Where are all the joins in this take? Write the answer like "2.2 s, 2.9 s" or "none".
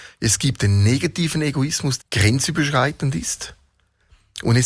2.0 s